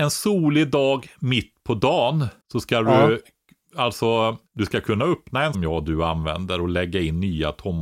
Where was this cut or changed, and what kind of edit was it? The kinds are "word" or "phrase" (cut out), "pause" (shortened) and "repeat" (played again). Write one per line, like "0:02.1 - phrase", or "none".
0:02.4 - pause
0:04.5 - pause
0:05.5 - phrase

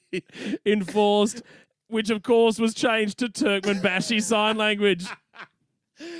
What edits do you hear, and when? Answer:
none

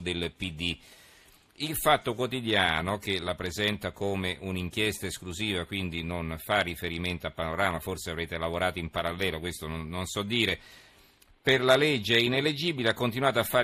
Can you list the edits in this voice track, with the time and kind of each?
none

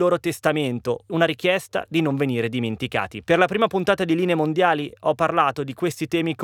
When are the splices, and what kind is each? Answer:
0:03.2 - pause

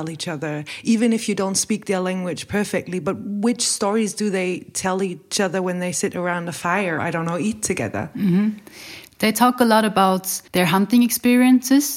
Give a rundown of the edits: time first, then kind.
0:07.0 - word
0:10.5 - pause

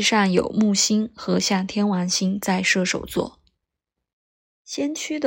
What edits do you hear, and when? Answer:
none

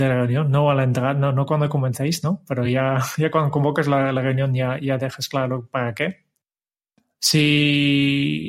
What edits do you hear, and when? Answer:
none

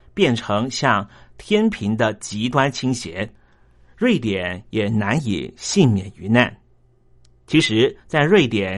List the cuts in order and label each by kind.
none

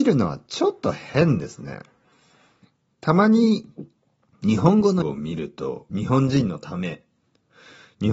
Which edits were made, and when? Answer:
0:05.0 - word
0:05.9 - word

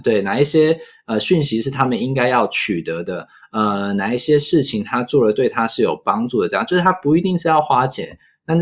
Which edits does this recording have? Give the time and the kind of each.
none

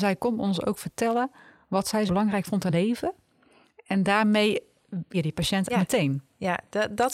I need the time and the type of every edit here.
0:02.1 - word
0:02.7 - word
0:05.1 - word
0:05.7 - word

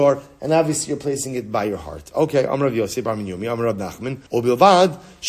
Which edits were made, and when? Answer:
0:04.3 - pause

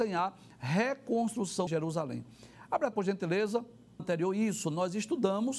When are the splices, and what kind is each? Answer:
0:01.7 - phrase
0:02.9 - word
0:04.0 - phrase

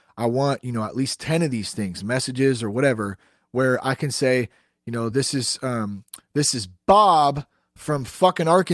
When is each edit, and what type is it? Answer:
none

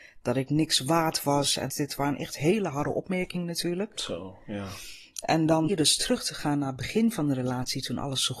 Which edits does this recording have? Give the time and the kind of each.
0:01.7 - word
0:05.7 - word

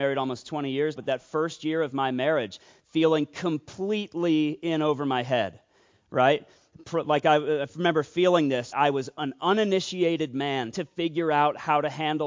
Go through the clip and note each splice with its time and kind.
0:01.0 - word
0:08.7 - word
0:10.7 - word

